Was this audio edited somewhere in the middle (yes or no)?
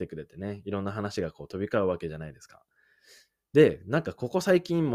no